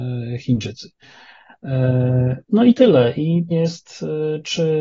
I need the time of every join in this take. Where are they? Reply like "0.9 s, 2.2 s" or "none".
2.4 s, 3.5 s